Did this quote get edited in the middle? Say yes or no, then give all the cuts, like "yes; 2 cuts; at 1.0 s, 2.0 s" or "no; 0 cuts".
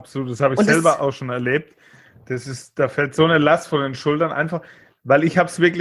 no; 0 cuts